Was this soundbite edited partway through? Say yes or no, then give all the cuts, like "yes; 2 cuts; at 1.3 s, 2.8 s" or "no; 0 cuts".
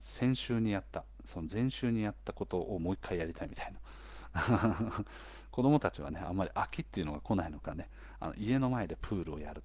no; 0 cuts